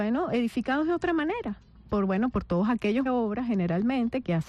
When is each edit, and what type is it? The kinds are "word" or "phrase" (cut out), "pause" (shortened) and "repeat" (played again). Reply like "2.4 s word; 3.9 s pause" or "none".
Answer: 3.1 s phrase